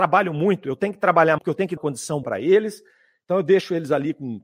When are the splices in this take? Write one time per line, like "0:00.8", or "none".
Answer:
0:01.4
0:01.8
0:02.2